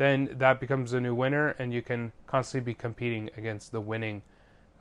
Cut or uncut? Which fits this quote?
cut